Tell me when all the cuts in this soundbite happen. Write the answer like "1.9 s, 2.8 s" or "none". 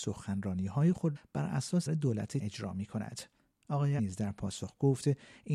1.2 s, 1.9 s, 2.4 s, 4.0 s